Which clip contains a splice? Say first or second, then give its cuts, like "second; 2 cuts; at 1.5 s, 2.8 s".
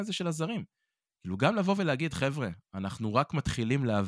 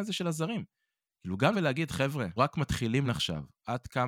second; 3 cuts; at 1.5 s, 2.4 s, 3.0 s